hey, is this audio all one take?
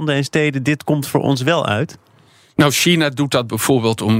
yes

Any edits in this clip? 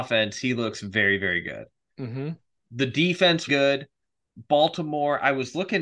yes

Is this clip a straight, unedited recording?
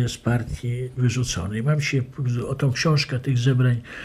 yes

